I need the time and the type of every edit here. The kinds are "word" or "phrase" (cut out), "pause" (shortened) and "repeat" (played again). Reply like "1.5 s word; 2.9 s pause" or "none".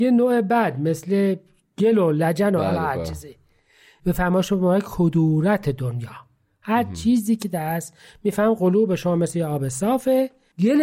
none

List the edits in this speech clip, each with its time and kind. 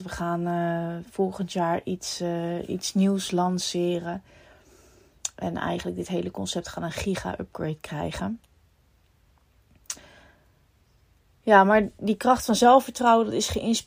none

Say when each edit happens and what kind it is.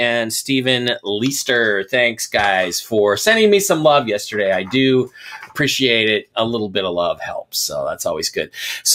6.3 s word

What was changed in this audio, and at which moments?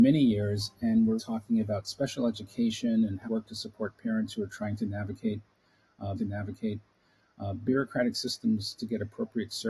1.2 s word; 3.2 s word; 6.2 s repeat

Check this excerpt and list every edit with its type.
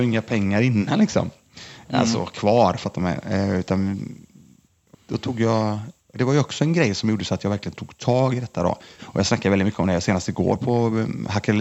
4.9 s word

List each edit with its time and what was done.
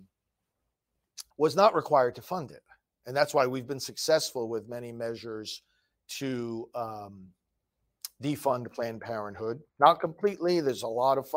1.3 s pause; 9.7 s pause

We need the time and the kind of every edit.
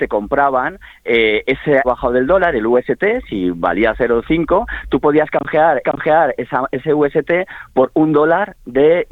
1.8 s phrase; 5.8 s repeat

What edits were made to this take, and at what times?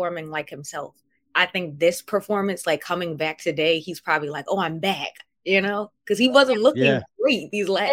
none

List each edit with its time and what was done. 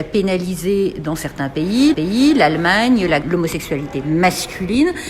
1.9 s repeat; 3.2 s word

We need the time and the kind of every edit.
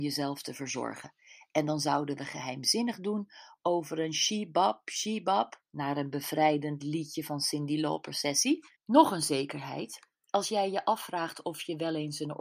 5.7 s pause; 8.8 s pause

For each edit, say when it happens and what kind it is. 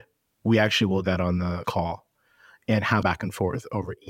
1.0 s word; 1.6 s word; 3.0 s word

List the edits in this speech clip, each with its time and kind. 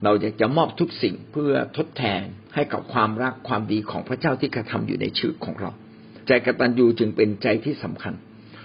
2.5 s pause; 6.2 s pause

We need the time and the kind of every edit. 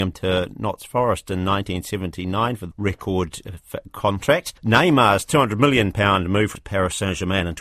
2.7 s word; 4.6 s pause; 6.5 s word

